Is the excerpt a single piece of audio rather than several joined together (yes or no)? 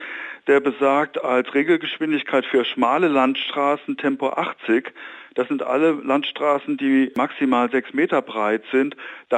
yes